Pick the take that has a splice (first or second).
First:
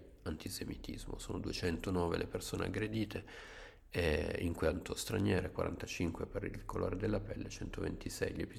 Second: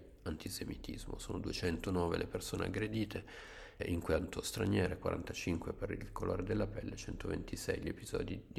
second